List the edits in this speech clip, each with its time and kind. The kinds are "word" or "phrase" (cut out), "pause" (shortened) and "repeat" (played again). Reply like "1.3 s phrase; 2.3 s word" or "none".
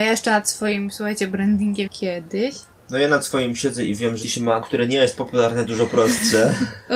1.9 s phrase; 2.7 s pause; 4.2 s word; 4.6 s word; 5.7 s phrase